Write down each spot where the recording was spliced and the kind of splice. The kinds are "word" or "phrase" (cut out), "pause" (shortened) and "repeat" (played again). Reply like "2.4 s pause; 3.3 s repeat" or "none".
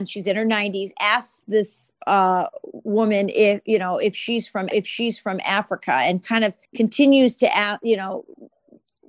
2.0 s pause; 4.7 s repeat; 6.6 s pause